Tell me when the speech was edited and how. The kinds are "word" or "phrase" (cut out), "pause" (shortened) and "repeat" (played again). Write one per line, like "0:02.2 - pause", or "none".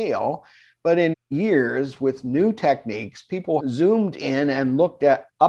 0:01.1 - word
0:03.6 - word